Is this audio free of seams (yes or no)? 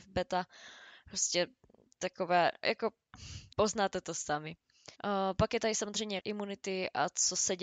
no